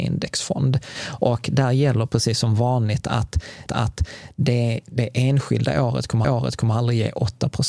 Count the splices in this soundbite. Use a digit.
2